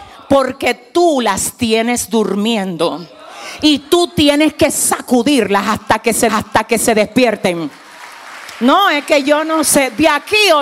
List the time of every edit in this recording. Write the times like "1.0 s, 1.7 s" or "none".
6.3 s